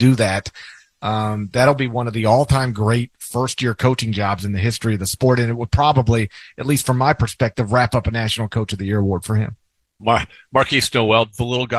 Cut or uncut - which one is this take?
uncut